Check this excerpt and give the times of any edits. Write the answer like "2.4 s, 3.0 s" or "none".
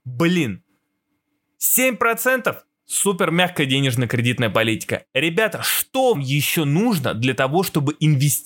6.1 s